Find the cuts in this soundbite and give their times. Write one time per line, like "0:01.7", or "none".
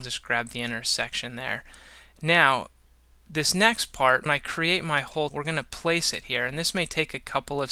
0:04.3
0:05.3